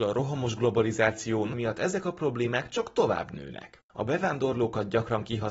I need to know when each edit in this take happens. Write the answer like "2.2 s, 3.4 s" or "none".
1.5 s